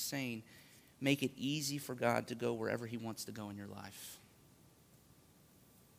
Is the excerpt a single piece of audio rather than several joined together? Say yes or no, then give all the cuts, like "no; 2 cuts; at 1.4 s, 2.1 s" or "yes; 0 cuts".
yes; 0 cuts